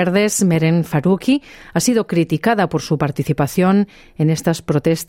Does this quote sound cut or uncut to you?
uncut